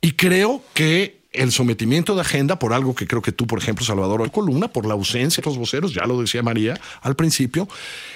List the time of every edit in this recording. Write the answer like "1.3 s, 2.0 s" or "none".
1.2 s, 4.2 s, 5.4 s